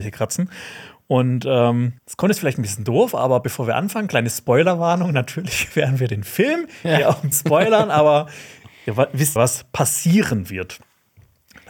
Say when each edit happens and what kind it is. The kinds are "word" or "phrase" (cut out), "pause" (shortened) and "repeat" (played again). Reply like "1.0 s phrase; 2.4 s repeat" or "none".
2.0 s pause; 7.3 s word; 9.4 s phrase